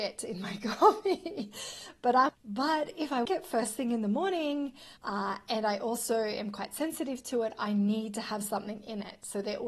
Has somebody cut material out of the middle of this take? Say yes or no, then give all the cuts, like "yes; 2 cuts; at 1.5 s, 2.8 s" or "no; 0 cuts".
yes; 3 cuts; at 2.3 s, 3.2 s, 5.0 s